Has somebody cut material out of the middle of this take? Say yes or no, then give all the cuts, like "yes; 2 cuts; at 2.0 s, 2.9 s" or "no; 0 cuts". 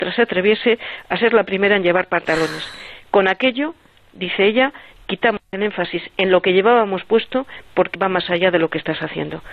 yes; 1 cut; at 7.9 s